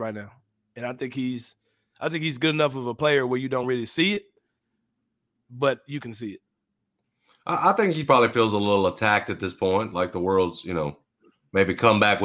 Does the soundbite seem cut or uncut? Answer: uncut